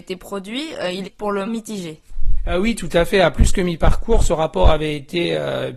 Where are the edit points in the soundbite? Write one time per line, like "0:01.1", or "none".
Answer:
0:01.0
0:01.5

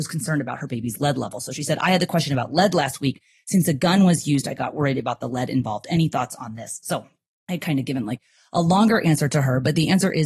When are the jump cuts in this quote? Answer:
none

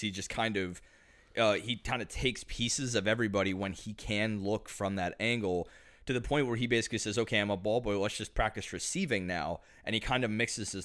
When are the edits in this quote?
none

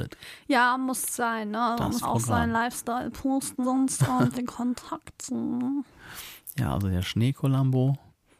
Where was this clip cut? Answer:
0:02.0
0:03.6
0:04.3

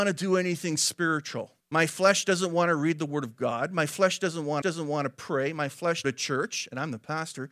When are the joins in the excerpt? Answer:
0:01.6
0:04.6
0:06.0

